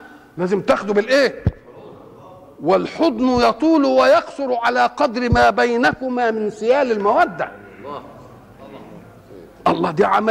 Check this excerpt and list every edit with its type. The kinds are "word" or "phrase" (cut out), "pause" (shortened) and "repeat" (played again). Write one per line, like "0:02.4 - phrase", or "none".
none